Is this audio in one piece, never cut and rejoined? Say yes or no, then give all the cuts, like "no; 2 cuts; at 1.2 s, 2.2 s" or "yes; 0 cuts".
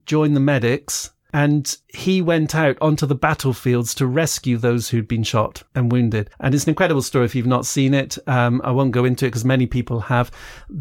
no; 2 cuts; at 1.8 s, 6.3 s